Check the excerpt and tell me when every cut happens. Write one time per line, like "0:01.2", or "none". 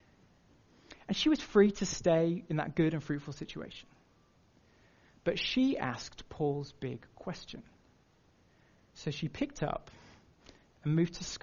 none